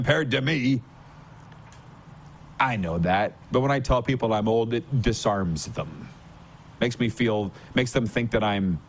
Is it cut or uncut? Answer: uncut